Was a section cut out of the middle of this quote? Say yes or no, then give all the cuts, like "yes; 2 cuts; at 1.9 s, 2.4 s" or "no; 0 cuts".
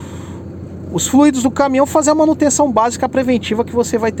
no; 0 cuts